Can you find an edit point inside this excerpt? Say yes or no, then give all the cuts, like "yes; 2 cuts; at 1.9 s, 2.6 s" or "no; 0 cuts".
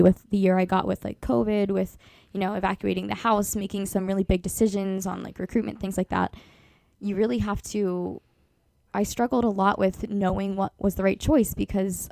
no; 0 cuts